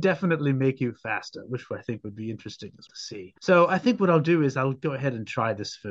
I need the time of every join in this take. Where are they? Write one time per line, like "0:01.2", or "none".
0:02.9
0:03.4